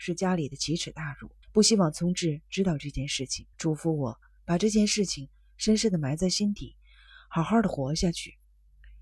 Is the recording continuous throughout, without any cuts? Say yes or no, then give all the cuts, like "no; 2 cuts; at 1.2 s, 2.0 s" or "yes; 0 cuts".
no; 2 cuts; at 1.4 s, 3.5 s